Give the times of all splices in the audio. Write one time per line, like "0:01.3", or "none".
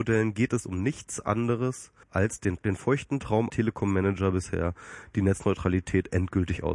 0:02.0
0:02.6
0:03.5